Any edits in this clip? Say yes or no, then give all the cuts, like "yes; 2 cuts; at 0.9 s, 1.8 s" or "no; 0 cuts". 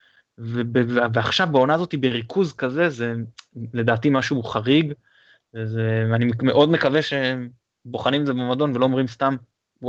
no; 0 cuts